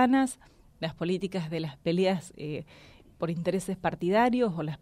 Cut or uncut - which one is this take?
uncut